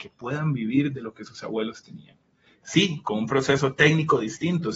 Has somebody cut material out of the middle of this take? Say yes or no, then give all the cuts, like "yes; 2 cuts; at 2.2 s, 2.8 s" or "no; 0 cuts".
no; 0 cuts